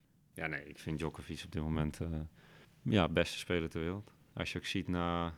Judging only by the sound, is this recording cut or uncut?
uncut